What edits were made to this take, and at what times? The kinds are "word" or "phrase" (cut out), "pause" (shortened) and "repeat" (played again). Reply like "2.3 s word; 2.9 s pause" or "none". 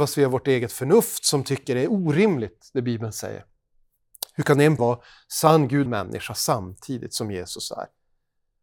4.8 s word; 5.9 s phrase